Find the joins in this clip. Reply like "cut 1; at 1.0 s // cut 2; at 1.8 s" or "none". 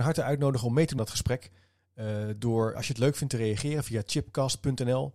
cut 1; at 1.0 s // cut 2; at 2.7 s